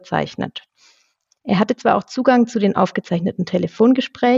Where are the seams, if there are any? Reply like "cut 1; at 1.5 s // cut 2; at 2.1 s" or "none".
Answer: none